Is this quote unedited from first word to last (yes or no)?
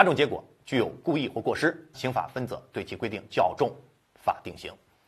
no